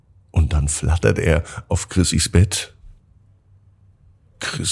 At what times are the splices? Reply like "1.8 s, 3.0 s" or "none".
none